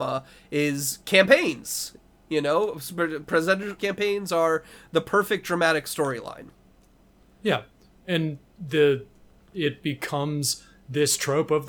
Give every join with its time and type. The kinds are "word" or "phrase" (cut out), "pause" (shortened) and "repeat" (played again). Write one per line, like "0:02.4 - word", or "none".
0:03.8 - word